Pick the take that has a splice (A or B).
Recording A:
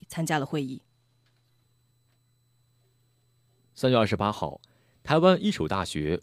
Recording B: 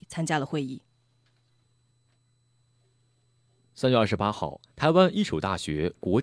B